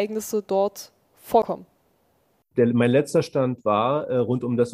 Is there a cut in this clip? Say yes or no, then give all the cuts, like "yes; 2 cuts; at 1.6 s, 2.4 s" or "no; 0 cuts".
no; 0 cuts